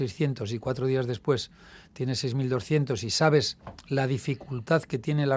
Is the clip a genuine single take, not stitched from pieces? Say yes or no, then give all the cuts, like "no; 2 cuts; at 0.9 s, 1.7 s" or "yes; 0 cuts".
yes; 0 cuts